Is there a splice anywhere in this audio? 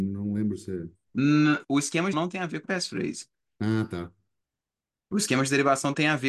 yes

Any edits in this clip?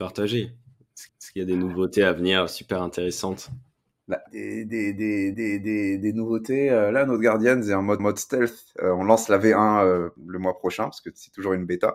yes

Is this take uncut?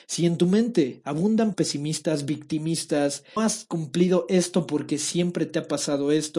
no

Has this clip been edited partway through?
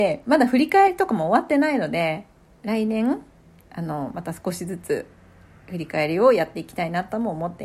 no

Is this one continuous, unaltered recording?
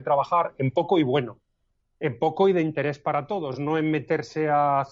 yes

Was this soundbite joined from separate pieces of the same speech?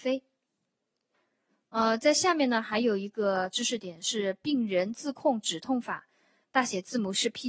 no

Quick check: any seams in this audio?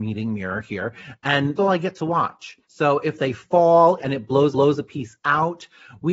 yes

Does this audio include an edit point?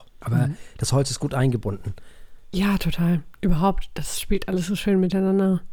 no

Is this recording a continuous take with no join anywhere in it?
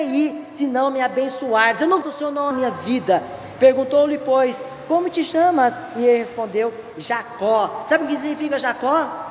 no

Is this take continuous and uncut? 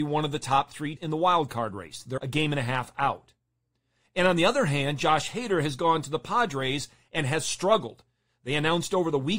no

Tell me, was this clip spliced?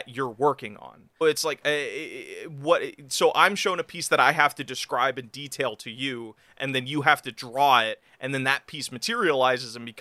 yes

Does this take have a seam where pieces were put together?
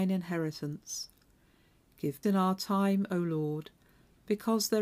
yes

